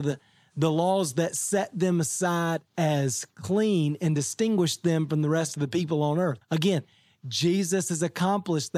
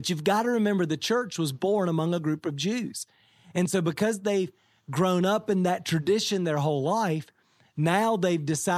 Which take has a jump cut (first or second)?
first